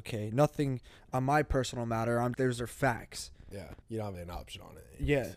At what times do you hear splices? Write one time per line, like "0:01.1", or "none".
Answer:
0:02.3
0:03.8
0:04.1

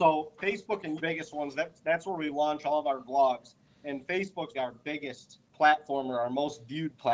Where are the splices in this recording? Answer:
0:01.0
0:04.5
0:05.5

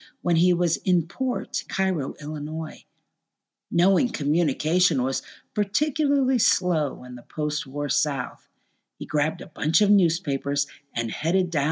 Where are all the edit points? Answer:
0:01.7

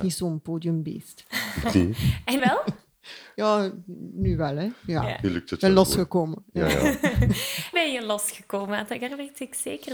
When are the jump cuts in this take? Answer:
0:02.4
0:07.7

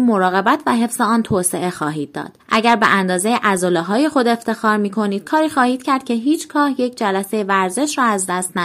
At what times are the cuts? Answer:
0:02.4

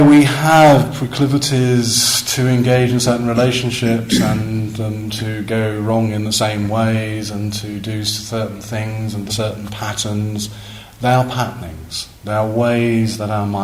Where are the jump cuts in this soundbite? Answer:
0:09.3
0:12.2

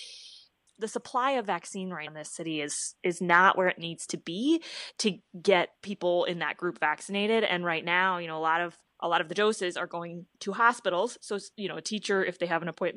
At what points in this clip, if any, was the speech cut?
0:02.1
0:05.8
0:08.9

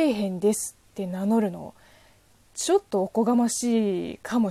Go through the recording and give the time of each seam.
none

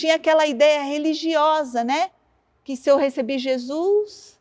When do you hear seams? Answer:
none

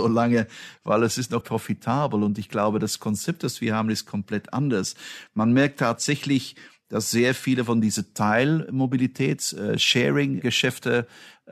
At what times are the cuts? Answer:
0:01.4

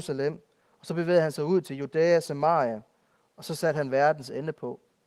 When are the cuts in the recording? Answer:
none

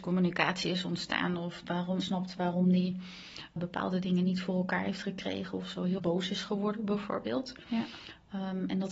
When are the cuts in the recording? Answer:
0:01.6
0:02.0
0:03.6
0:06.0

